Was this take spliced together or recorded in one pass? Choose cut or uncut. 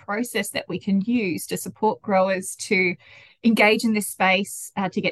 uncut